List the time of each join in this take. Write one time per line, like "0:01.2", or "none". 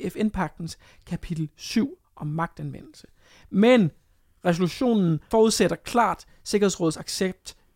none